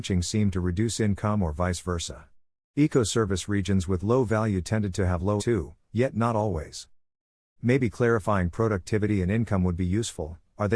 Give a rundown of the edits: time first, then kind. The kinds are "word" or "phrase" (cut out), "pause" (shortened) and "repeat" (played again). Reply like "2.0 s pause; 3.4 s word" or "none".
5.4 s word